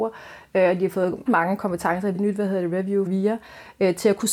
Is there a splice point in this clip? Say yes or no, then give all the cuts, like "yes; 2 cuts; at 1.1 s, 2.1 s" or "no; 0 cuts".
yes; 3 cuts; at 1.3 s, 2.1 s, 3.1 s